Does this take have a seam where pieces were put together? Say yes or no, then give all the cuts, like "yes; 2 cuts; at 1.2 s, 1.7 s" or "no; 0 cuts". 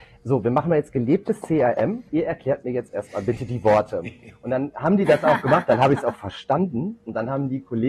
yes; 1 cut; at 2.1 s